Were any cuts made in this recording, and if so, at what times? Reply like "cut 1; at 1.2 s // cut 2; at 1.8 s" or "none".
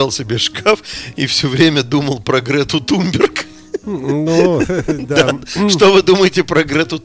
none